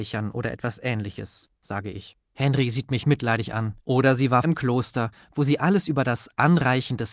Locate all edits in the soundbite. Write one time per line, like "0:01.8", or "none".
0:02.2
0:03.8
0:04.4